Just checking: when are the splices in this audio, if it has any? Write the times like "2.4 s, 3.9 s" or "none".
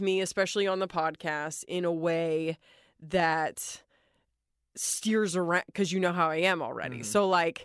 none